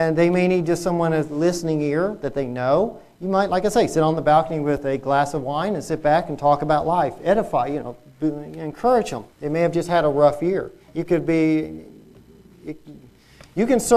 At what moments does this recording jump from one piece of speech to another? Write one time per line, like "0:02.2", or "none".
0:09.3
0:10.8